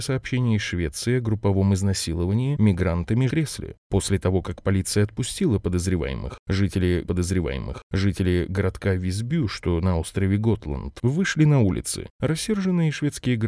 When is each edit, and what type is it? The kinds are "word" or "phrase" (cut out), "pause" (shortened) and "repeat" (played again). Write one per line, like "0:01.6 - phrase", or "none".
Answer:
0:03.3 - phrase
0:07.0 - repeat